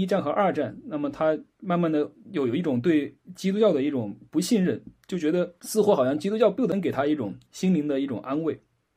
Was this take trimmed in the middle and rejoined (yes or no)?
yes